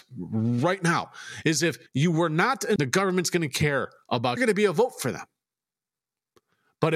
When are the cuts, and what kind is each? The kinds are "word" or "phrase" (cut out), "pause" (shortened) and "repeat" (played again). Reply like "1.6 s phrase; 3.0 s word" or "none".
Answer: 1.9 s pause; 2.8 s word; 4.4 s phrase